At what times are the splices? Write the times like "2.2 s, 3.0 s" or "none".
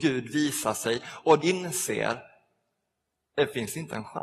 1.4 s